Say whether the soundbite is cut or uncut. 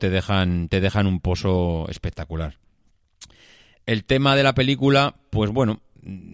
uncut